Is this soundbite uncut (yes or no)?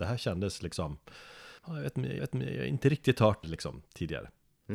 no